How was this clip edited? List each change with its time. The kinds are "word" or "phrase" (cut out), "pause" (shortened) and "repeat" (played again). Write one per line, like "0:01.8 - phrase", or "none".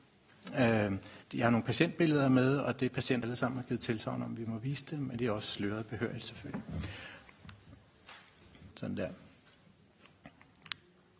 0:01.2 - pause
0:03.2 - word
0:08.7 - pause